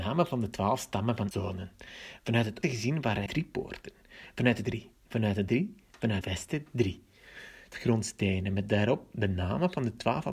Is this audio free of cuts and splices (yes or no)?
no